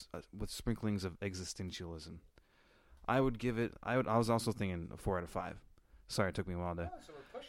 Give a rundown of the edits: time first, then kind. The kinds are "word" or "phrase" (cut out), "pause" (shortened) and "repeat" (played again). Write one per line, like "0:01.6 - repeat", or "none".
none